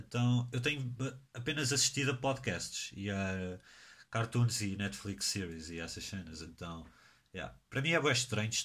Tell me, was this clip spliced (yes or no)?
no